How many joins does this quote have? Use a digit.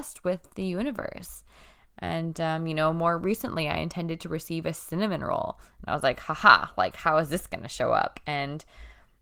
0